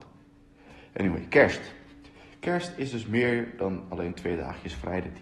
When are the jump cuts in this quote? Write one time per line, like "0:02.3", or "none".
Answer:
none